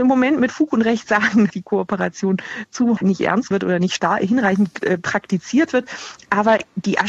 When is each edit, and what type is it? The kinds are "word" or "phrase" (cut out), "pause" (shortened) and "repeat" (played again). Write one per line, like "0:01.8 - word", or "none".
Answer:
0:01.5 - word
0:03.0 - word
0:03.5 - word